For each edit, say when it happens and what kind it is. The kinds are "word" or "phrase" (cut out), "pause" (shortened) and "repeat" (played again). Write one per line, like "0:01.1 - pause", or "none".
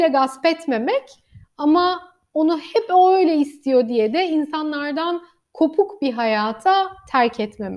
none